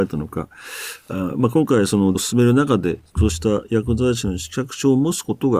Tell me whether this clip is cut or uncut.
cut